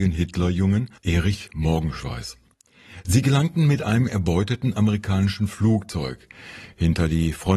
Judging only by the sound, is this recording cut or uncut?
cut